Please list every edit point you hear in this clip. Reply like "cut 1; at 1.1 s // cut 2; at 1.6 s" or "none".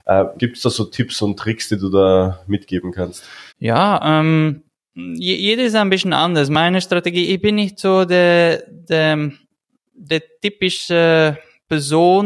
cut 1; at 3.5 s // cut 2; at 4.7 s

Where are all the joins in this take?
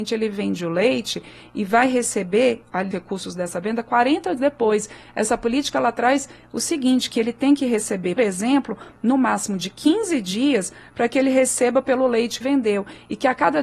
cut 1; at 2.9 s // cut 2; at 4.4 s // cut 3; at 8.2 s // cut 4; at 12.4 s

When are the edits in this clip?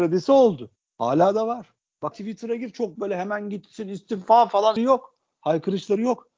cut 1; at 2.1 s // cut 2; at 3.0 s // cut 3; at 4.8 s

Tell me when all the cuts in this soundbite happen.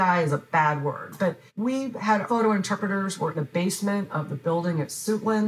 cut 1; at 1.5 s // cut 2; at 2.2 s // cut 3; at 3.3 s

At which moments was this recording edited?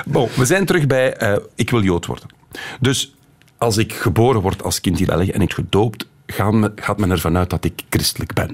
cut 1; at 5.1 s // cut 2; at 5.5 s

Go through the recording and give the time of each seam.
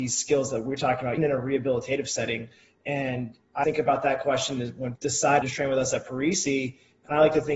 cut 1; at 1.2 s // cut 2; at 3.6 s // cut 3; at 5.0 s // cut 4; at 5.4 s

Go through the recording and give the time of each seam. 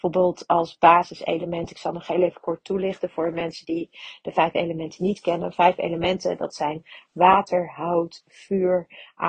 none

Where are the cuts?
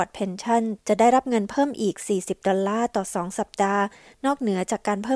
none

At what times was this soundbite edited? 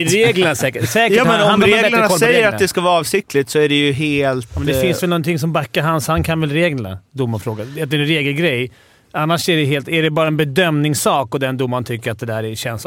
none

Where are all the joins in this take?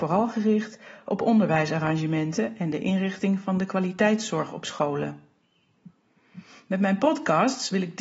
none

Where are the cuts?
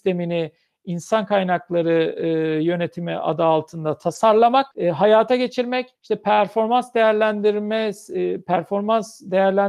cut 1; at 4.7 s // cut 2; at 5.9 s

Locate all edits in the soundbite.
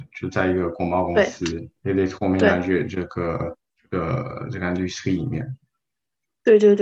cut 1; at 1.7 s

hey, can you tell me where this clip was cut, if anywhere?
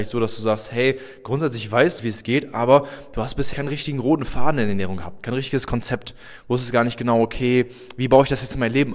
cut 1; at 2.0 s // cut 2; at 3.5 s

